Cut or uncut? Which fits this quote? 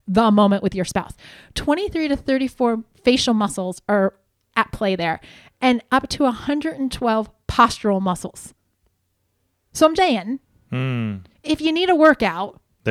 cut